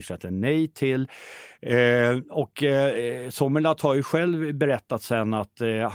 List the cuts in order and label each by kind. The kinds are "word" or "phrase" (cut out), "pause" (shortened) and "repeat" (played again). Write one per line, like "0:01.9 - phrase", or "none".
none

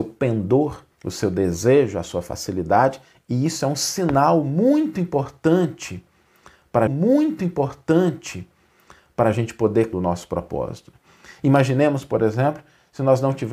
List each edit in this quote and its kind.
0:00.9 - pause
0:06.9 - repeat
0:09.9 - phrase

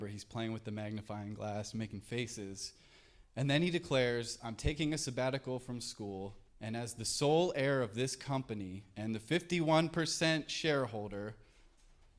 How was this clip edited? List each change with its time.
0:06.5 - pause

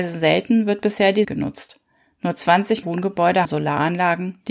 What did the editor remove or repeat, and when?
0:01.2 - word
0:02.8 - word
0:03.4 - word

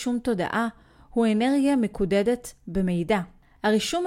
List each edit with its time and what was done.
none

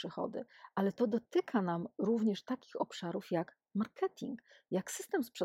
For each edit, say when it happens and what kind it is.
none

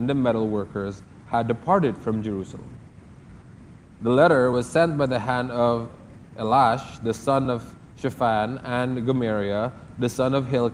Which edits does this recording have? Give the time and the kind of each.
none

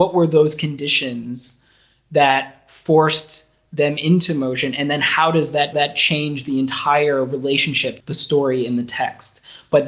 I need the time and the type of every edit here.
0:05.7 - repeat
0:08.0 - word

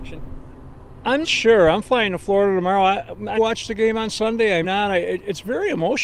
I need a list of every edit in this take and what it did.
0:01.2 - word
0:03.4 - word
0:04.6 - word

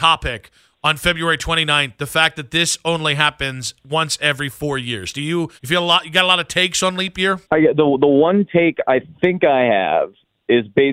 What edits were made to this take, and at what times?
0:05.6 - pause
0:07.4 - pause

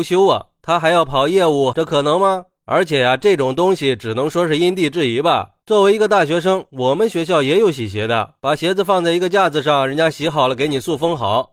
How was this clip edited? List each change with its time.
0:01.7 - phrase

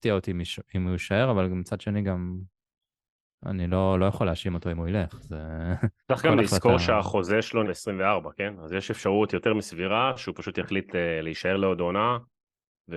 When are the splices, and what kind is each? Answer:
0:06.0 - pause
0:07.6 - phrase

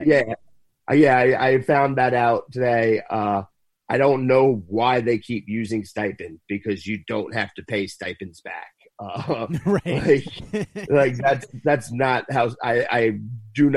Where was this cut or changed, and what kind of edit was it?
none

